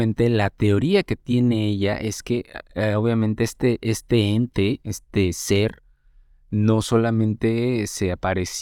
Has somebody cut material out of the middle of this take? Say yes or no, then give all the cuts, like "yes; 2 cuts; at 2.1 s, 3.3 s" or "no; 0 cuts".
no; 0 cuts